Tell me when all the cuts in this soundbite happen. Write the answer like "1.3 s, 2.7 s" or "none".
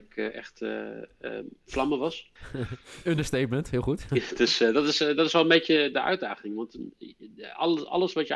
2.4 s